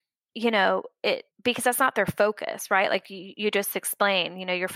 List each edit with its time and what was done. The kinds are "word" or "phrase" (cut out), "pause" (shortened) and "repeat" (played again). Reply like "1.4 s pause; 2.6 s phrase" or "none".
1.3 s pause